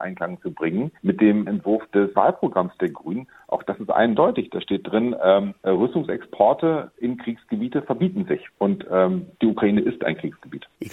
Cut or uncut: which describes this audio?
cut